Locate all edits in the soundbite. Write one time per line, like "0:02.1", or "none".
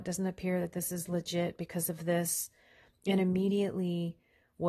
none